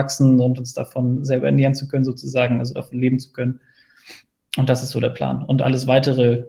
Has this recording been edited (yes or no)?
no